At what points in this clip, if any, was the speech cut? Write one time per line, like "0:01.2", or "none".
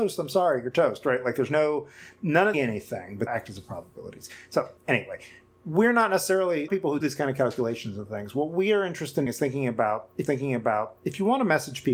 0:02.5
0:03.3
0:04.8
0:06.7
0:07.0
0:09.3
0:10.3